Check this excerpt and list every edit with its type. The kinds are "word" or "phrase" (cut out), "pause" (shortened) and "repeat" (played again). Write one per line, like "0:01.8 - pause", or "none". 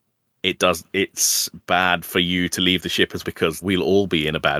0:03.2 - word
0:03.6 - word